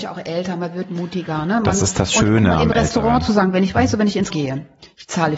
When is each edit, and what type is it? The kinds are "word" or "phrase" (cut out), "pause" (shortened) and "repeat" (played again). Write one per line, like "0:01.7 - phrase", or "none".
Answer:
0:04.3 - word